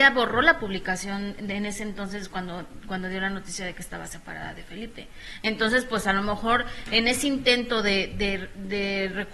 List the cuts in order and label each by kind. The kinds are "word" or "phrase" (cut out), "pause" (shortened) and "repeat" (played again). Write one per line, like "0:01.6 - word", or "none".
none